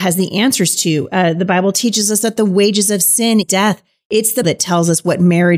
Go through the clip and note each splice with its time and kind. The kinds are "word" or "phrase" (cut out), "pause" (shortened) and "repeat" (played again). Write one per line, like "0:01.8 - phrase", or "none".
0:03.4 - word
0:04.4 - word